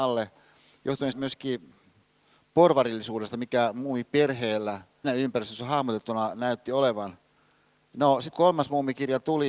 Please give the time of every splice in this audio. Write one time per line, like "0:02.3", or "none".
0:01.1
0:05.0
0:08.3